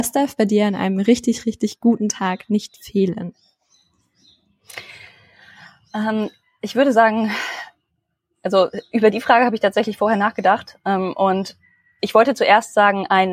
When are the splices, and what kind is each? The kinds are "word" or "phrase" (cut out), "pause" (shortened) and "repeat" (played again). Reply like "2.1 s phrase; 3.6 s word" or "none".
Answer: none